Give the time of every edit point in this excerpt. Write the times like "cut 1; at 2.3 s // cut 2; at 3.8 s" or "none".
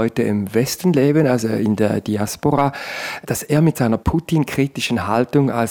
none